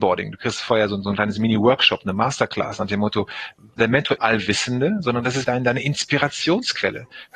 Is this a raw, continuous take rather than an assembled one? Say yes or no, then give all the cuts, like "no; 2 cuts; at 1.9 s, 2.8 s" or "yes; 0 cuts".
no; 3 cuts; at 3.8 s, 4.2 s, 5.4 s